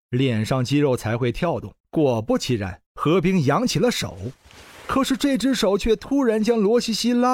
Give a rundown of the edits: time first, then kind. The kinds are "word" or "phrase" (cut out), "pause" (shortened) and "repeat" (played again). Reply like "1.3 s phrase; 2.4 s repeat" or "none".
1.8 s pause; 2.9 s pause